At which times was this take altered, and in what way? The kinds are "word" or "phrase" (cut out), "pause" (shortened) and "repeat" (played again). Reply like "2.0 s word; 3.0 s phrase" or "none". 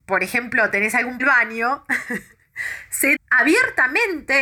1.2 s phrase; 3.2 s word